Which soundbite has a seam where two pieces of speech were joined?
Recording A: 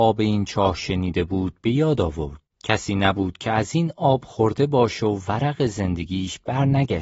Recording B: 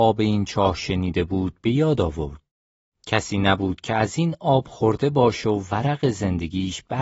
A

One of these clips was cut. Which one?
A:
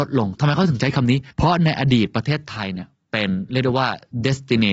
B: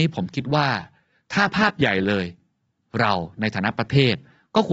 A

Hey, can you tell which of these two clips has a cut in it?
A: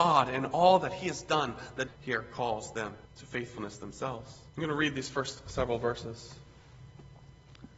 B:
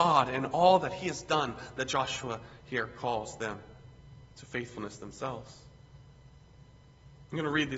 A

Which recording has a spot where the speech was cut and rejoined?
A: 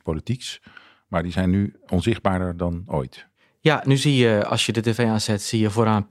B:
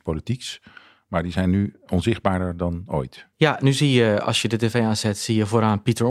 B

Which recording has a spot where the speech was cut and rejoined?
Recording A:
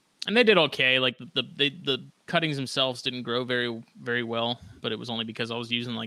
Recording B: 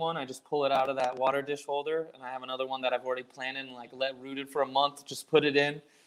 A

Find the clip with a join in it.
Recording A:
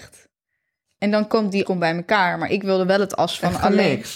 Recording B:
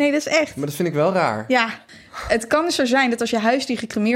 A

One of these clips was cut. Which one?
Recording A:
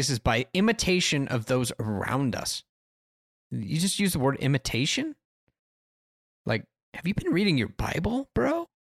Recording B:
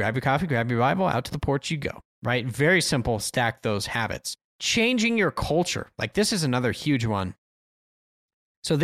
B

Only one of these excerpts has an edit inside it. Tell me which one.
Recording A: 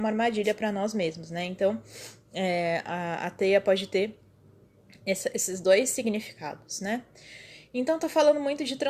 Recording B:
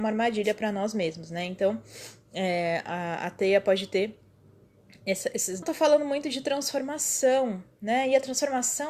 B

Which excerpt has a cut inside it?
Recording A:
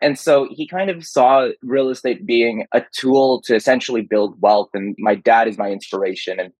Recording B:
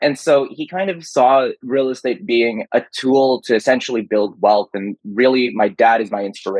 A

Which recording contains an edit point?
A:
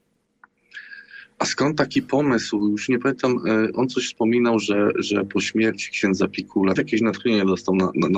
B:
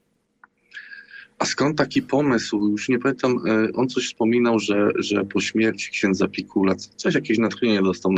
A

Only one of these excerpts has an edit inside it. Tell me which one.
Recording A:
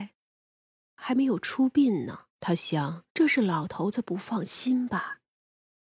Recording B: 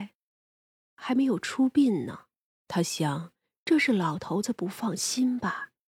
A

